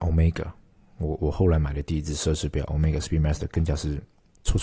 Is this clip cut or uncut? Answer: uncut